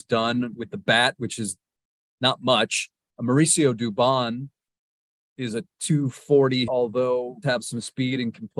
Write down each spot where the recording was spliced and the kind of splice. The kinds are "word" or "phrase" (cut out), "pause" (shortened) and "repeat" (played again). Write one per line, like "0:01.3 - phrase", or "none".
0:06.7 - word
0:07.4 - word